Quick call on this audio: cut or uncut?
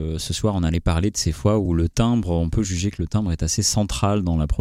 uncut